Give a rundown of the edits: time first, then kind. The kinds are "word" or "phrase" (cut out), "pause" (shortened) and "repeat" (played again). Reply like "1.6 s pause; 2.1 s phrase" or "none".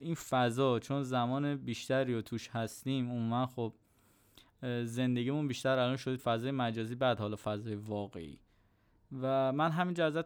6.2 s word